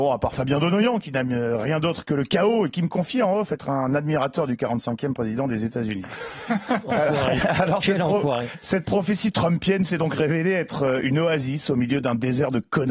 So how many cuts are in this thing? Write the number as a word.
zero